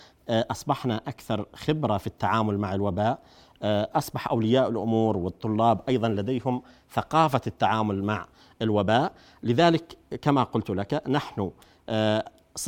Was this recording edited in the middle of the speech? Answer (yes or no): no